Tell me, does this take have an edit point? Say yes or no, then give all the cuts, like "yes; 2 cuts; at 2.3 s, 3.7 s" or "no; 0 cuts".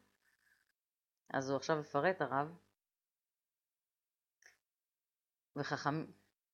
no; 0 cuts